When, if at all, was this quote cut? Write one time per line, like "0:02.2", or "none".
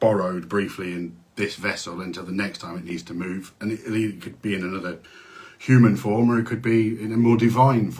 none